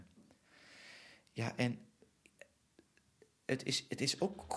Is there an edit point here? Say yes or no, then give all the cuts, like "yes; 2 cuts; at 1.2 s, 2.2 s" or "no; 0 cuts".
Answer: no; 0 cuts